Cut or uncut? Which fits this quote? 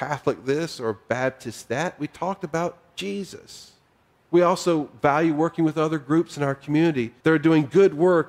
cut